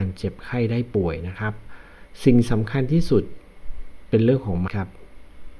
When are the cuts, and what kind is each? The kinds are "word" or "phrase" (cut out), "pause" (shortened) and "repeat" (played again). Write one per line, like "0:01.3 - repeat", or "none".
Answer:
0:04.7 - word